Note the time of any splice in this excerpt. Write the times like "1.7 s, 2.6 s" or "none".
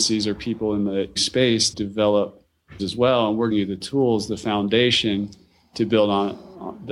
1.2 s, 1.7 s, 2.8 s, 3.5 s